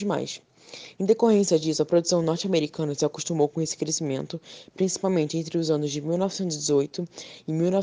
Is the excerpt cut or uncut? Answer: uncut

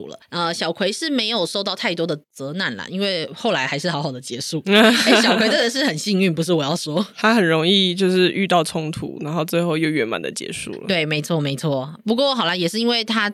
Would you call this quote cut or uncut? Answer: cut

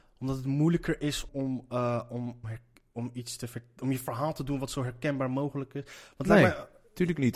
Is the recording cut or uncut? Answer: cut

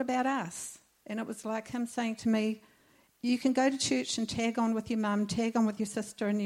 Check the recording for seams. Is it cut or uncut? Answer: uncut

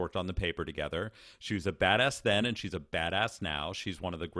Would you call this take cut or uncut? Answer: uncut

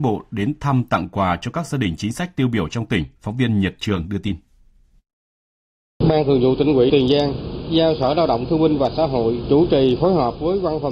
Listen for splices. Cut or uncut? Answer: cut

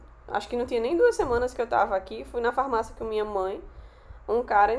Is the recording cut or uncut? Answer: uncut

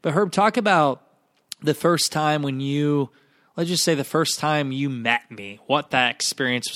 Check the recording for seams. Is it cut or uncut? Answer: uncut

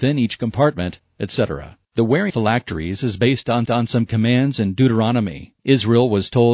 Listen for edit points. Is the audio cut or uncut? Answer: cut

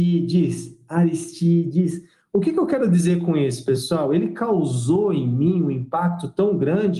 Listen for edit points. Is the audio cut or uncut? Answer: uncut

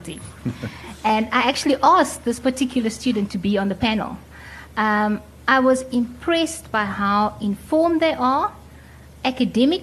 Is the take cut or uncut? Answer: uncut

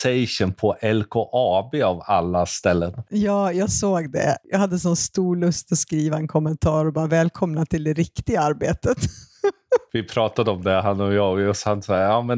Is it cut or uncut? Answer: uncut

